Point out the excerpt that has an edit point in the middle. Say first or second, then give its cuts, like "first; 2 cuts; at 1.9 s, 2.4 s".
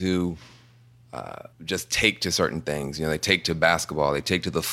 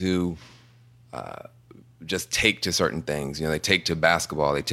first; 1 cut; at 1.5 s